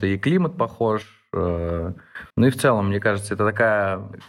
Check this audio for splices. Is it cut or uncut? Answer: cut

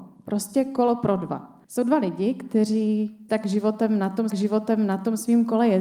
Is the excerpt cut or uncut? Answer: cut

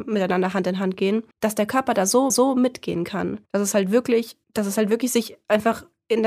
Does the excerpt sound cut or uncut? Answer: cut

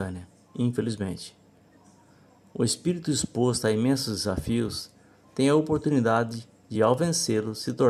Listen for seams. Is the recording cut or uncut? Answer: uncut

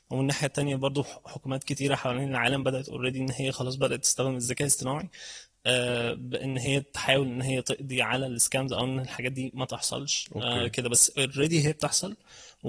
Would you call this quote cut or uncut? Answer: uncut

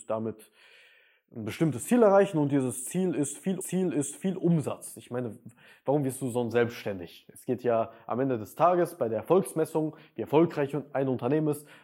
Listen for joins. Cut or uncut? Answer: cut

